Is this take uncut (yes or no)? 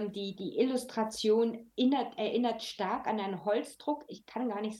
yes